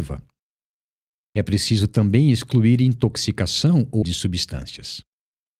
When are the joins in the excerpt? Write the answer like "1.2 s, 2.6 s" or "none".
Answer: 4.0 s